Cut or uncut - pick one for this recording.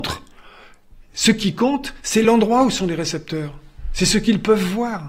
uncut